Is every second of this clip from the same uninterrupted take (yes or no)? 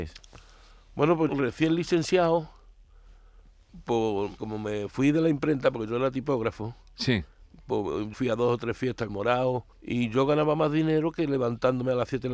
no